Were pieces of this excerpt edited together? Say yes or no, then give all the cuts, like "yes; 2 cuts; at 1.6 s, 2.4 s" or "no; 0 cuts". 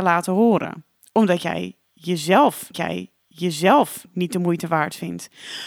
yes; 1 cut; at 2.7 s